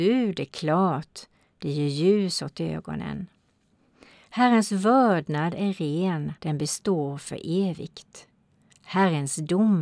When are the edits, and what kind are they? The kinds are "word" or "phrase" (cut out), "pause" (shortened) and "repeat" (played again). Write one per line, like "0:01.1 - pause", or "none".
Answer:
0:06.4 - pause